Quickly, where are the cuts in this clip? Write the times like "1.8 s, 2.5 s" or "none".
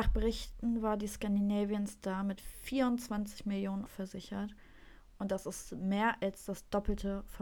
3.9 s